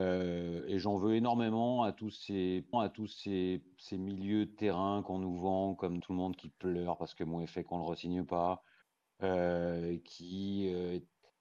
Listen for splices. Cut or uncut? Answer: cut